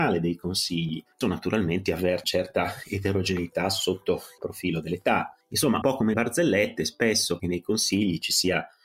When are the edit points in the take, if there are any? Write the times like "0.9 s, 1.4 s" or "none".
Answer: 1.2 s, 1.9 s, 2.2 s, 4.4 s, 5.8 s, 6.1 s, 7.4 s